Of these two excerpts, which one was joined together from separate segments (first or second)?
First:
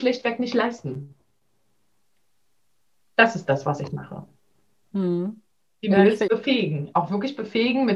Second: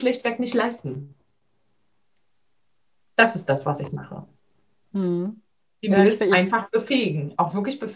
first